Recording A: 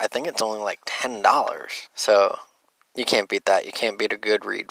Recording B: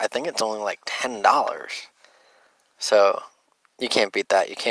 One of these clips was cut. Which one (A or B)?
A